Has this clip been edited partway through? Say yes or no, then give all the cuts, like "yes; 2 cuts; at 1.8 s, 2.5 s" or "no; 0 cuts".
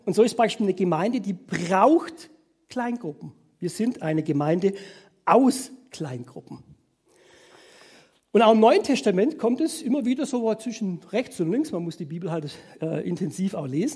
no; 0 cuts